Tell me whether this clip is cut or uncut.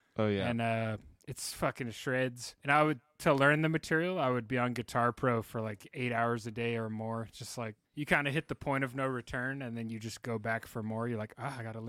cut